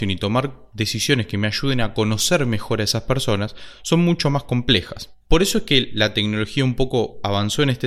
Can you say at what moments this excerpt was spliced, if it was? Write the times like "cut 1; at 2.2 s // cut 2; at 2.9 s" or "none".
cut 1; at 5.2 s